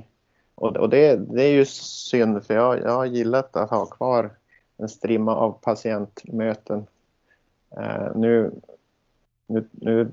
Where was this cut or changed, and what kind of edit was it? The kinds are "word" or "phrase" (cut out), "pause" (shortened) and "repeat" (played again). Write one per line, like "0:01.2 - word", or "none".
none